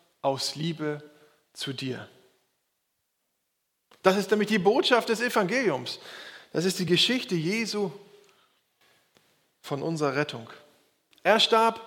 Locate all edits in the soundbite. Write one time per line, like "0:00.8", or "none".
none